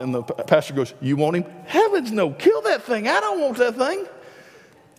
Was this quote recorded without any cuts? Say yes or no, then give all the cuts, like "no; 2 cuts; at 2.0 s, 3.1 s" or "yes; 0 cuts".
yes; 0 cuts